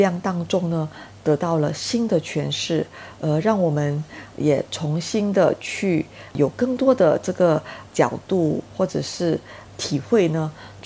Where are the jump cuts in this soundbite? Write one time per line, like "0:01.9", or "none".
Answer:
none